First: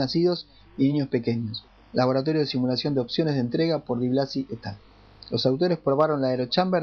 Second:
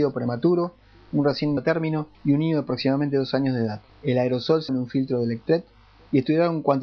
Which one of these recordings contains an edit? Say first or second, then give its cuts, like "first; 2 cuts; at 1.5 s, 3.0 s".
second; 4 cuts; at 1.6 s, 2.1 s, 3.9 s, 4.7 s